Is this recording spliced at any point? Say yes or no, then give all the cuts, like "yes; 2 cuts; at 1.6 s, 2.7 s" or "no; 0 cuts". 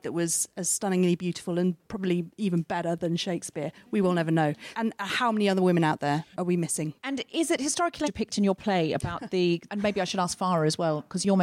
yes; 2 cuts; at 6.3 s, 8.0 s